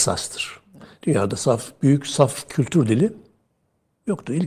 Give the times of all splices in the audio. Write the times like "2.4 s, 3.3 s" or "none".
none